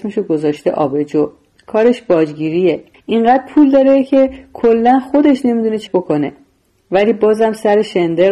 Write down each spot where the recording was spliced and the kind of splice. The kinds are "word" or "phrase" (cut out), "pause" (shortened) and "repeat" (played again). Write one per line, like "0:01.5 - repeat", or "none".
0:02.9 - pause
0:05.9 - word